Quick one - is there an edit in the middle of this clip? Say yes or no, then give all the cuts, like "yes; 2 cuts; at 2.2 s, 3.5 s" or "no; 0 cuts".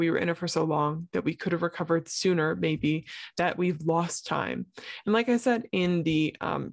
no; 0 cuts